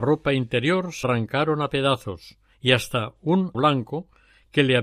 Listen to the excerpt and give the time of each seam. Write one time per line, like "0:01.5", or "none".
0:01.0
0:02.5
0:03.5